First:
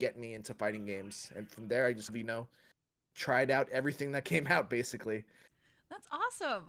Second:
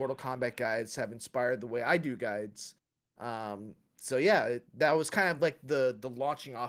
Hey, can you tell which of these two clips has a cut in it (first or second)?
first